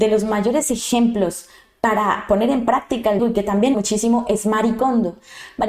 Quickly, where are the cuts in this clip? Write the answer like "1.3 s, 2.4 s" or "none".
3.2 s, 3.7 s